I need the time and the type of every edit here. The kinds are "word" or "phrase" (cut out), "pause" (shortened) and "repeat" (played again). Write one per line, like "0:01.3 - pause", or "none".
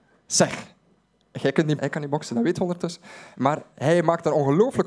0:01.8 - word